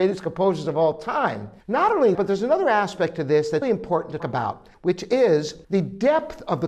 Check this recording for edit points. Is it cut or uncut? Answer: cut